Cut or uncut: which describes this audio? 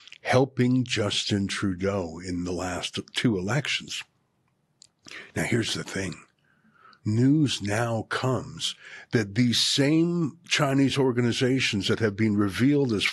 uncut